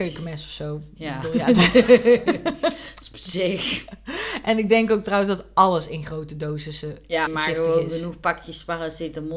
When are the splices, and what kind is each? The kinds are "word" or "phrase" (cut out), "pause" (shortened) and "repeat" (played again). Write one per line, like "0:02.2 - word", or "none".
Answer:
0:07.3 - phrase

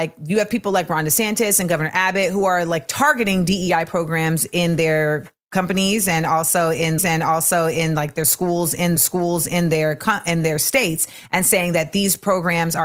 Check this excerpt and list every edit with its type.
0:07.0 - repeat
0:09.0 - repeat

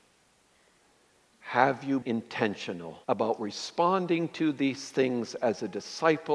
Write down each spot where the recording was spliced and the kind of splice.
0:02.0 - word
0:03.0 - pause

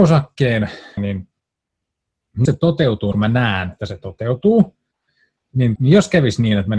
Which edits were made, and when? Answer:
0:01.0 - word
0:02.5 - word
0:03.1 - word
0:03.8 - word
0:05.8 - word

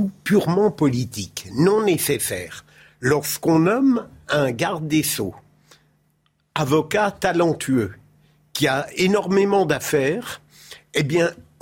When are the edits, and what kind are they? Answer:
none

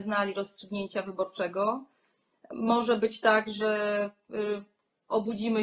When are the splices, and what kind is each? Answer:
none

